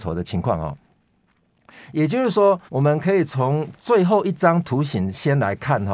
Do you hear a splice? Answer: yes; 1 cut; at 2.7 s

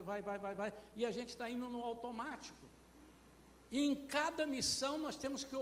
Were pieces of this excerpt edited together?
no; 0 cuts

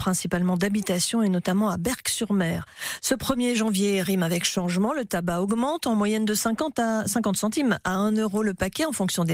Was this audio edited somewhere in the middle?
no; 0 cuts

